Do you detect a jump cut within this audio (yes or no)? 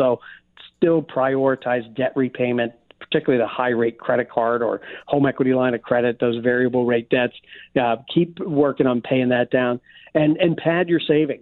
no